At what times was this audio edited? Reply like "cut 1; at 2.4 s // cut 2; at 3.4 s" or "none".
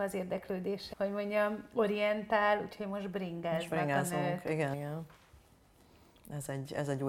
cut 1; at 0.9 s // cut 2; at 4.7 s